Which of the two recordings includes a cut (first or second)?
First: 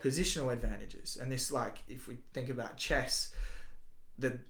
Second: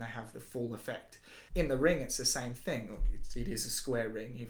second